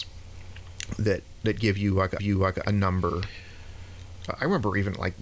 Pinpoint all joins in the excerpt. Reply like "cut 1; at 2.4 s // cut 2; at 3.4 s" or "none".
cut 1; at 2.2 s